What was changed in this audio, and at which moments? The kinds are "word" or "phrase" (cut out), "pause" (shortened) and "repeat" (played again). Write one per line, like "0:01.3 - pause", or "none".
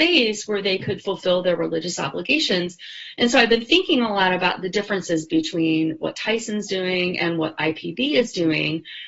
none